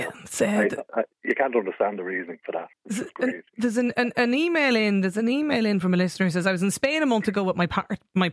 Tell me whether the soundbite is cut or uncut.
cut